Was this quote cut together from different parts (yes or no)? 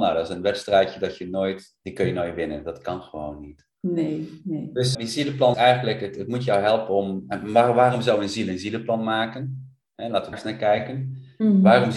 yes